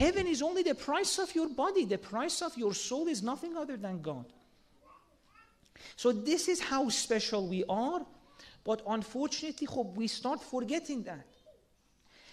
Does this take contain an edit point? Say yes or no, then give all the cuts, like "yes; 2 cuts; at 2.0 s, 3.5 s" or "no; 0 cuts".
no; 0 cuts